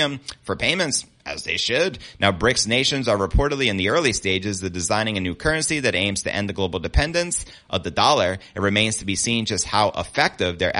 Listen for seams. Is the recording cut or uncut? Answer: uncut